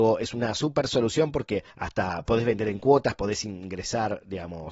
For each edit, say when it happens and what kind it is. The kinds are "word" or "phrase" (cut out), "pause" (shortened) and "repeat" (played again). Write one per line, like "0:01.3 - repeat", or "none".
0:01.7 - pause

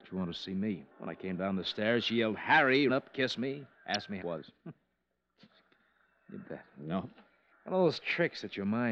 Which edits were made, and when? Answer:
0:00.9 - pause
0:02.9 - word
0:03.7 - pause
0:04.2 - phrase
0:06.4 - word
0:07.5 - pause

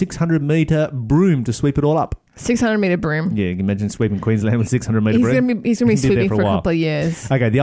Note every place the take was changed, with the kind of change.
0:02.3 - pause

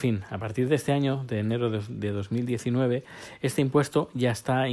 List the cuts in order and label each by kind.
none

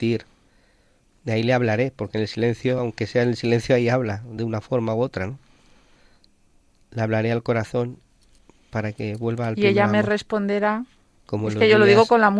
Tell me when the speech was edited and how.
none

